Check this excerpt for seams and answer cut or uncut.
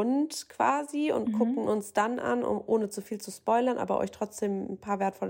uncut